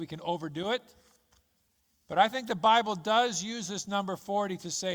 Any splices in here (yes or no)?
no